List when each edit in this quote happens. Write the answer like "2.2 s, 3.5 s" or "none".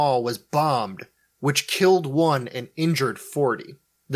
none